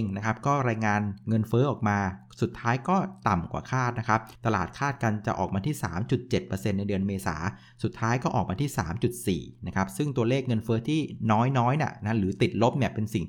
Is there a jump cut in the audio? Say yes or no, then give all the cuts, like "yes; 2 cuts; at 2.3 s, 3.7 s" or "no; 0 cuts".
yes; 1 cut; at 4.4 s